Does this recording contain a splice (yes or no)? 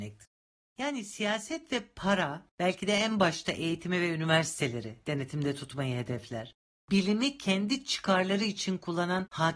no